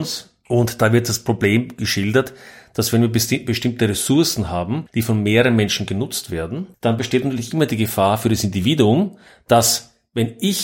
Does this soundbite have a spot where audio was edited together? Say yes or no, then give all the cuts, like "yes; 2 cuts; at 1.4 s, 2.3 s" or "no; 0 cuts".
no; 0 cuts